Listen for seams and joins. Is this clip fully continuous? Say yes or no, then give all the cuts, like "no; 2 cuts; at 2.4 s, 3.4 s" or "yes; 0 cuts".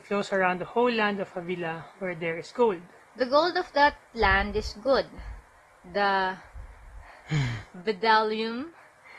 yes; 0 cuts